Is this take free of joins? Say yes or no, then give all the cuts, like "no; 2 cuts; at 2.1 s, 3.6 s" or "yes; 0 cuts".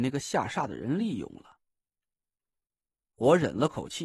yes; 0 cuts